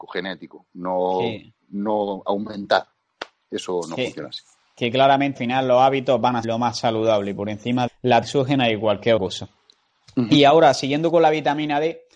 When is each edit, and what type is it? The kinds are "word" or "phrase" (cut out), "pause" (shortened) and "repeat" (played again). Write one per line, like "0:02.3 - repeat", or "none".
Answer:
0:05.4 - word
0:06.4 - word
0:07.9 - word
0:08.2 - word
0:09.2 - word